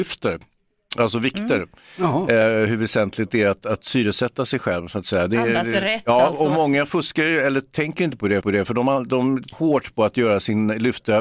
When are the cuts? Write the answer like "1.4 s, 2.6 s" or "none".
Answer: 8.4 s, 9.5 s